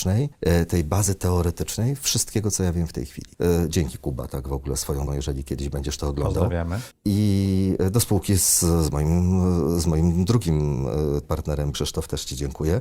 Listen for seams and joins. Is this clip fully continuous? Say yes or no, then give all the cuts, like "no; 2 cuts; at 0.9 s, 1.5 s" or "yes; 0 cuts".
no; 3 cuts; at 5.1 s, 11.2 s, 11.7 s